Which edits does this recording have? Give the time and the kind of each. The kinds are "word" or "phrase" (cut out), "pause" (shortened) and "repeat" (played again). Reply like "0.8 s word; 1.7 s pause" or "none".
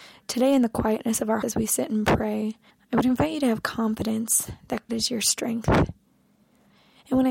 1.4 s word; 2.7 s pause; 4.9 s word